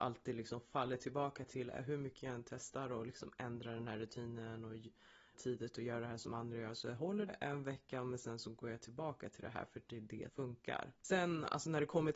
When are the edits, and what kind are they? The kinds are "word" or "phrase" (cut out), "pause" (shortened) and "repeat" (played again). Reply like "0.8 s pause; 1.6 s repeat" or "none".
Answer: 5.3 s word; 7.3 s word; 10.3 s word; 11.0 s pause